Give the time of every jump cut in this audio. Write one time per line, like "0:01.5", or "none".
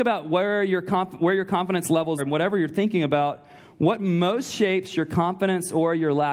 0:02.2

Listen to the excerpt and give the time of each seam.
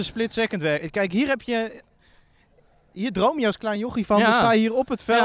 none

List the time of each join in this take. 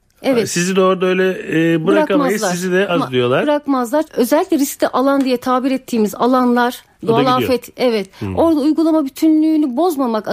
0:02.9
0:04.0

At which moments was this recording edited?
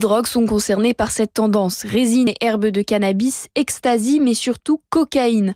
none

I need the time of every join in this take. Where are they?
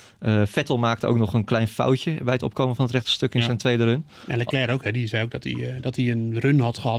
none

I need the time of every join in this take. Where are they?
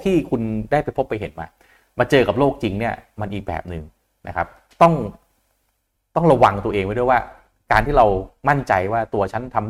none

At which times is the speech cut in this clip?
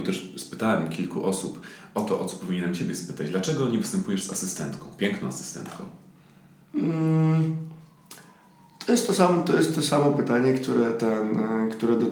none

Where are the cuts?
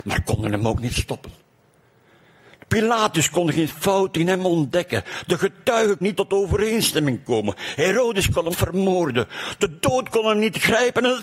0:06.0
0:08.5

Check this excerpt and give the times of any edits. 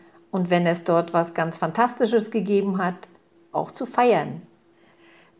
0:03.5

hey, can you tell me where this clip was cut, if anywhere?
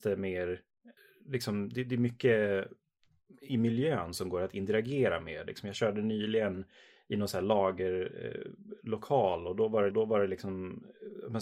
0:01.0
0:09.9

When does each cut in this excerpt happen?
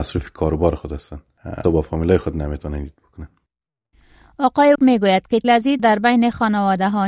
0:01.6
0:04.7
0:05.4
0:05.8

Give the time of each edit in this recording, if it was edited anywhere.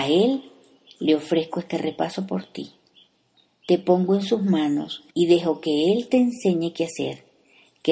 0:05.1

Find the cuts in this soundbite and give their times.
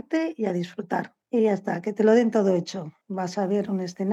0:01.2
0:03.0

